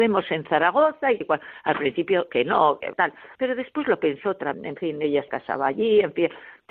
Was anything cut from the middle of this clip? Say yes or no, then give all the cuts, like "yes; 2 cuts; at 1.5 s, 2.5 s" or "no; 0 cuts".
yes; 6 cuts; at 1.2 s, 2.3 s, 2.9 s, 3.4 s, 4.5 s, 5.3 s